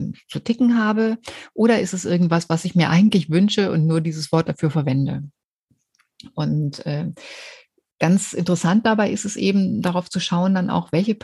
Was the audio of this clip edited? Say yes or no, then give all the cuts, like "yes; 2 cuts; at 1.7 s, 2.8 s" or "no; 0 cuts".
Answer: no; 0 cuts